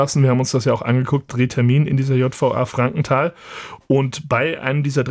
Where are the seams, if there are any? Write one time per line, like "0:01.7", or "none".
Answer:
0:01.3